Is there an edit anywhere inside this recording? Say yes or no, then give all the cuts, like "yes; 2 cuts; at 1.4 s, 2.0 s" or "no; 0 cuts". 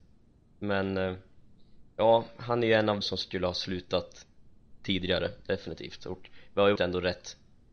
yes; 3 cuts; at 1.9 s, 3.0 s, 6.8 s